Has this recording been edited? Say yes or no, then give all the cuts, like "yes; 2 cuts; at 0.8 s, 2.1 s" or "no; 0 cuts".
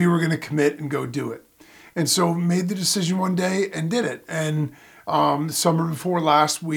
no; 0 cuts